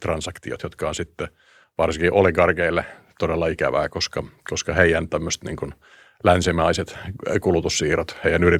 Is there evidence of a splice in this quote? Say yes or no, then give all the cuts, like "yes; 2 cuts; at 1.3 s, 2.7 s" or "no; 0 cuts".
no; 0 cuts